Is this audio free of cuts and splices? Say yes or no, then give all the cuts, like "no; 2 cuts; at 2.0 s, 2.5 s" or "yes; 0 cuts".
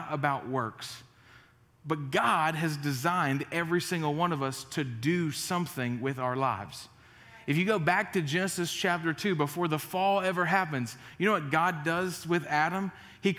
yes; 0 cuts